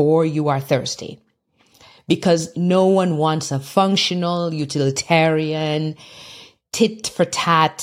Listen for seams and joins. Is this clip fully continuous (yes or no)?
yes